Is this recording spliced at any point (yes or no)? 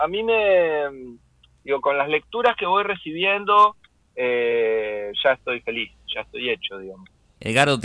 no